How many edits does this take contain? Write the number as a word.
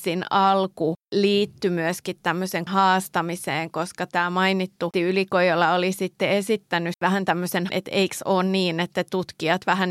four